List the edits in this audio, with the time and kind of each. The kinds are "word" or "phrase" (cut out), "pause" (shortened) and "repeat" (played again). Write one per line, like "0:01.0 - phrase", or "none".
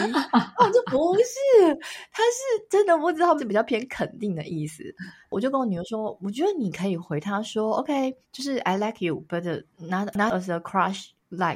0:03.4 - word
0:08.2 - pause
0:09.7 - pause